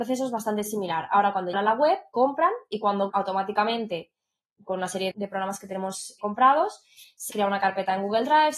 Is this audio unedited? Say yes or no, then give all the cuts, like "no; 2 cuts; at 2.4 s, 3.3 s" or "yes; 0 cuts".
no; 5 cuts; at 1.5 s, 3.1 s, 5.1 s, 6.2 s, 7.3 s